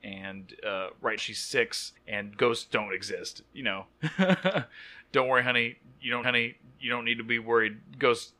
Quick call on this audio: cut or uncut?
cut